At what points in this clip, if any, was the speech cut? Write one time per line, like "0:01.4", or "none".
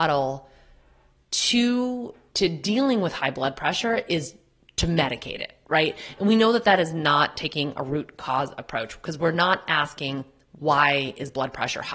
0:02.3